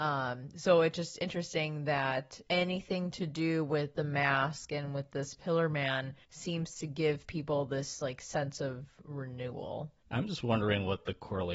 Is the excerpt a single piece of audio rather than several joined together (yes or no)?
no